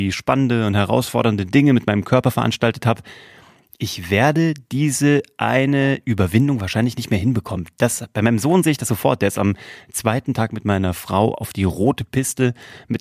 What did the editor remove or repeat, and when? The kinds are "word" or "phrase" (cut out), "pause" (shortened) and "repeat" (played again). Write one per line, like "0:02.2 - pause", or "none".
none